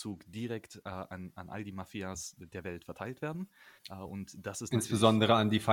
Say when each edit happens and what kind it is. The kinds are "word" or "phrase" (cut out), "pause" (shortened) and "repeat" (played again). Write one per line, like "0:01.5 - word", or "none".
0:03.8 - pause